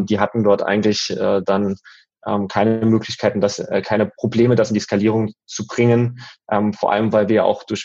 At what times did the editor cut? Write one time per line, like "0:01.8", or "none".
none